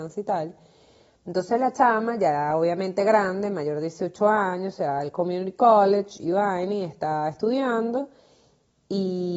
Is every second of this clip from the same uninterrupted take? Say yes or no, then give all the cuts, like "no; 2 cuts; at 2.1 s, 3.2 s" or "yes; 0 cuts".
yes; 0 cuts